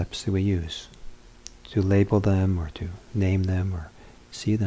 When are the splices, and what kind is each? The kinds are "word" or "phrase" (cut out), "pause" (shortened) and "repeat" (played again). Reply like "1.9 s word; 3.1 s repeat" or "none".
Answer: 1.6 s pause